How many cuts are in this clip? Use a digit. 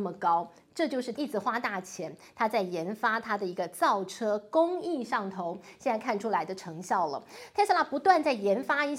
1